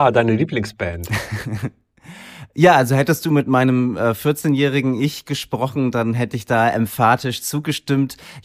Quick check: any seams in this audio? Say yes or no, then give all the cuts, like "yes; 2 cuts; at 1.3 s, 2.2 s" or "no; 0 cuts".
no; 0 cuts